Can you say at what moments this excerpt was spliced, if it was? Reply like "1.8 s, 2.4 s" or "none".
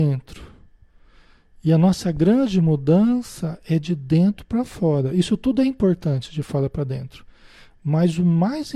none